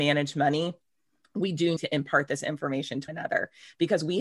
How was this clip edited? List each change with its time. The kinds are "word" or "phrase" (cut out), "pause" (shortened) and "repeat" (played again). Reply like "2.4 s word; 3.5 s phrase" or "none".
1.8 s word; 3.1 s word

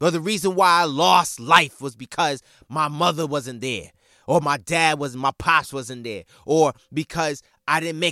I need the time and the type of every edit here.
none

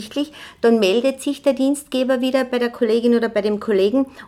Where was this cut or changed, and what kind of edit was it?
none

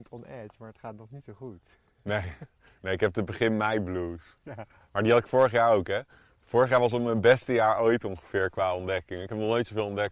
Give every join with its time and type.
none

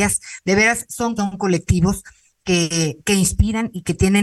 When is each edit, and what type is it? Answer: 1.2 s word

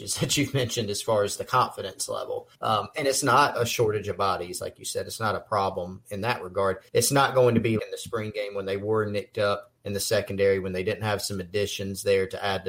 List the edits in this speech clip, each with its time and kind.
2.5 s pause; 3.5 s word; 6.9 s pause; 7.8 s word; 9.8 s pause

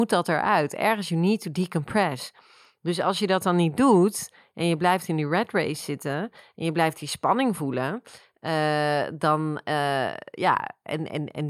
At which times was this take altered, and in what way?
none

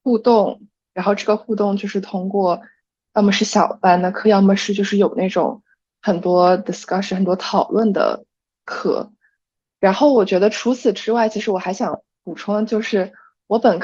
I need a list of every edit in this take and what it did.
none

